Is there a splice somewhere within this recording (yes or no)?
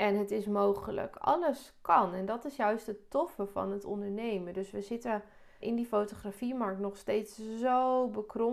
yes